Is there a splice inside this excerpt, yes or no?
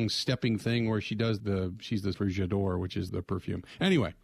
yes